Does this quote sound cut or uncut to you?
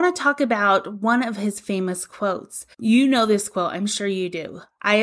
cut